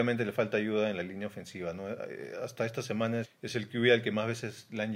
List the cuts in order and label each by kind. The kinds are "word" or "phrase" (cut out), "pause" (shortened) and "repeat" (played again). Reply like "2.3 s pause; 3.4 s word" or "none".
3.2 s word